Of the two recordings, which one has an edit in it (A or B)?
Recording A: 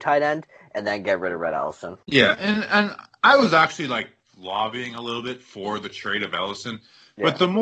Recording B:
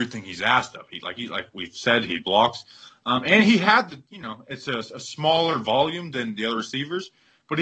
A